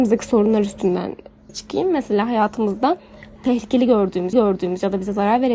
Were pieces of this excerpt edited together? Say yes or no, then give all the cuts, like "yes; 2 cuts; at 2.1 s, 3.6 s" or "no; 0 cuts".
yes; 3 cuts; at 1.5 s, 3.4 s, 4.3 s